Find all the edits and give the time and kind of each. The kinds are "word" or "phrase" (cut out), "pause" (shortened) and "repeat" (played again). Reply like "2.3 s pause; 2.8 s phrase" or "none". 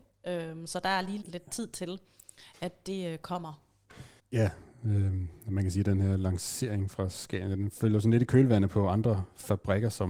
1.2 s word; 4.2 s pause